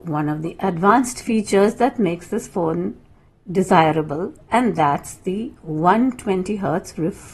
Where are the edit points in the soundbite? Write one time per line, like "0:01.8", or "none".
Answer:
none